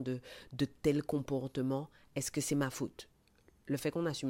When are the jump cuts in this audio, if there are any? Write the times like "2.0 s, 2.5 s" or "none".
none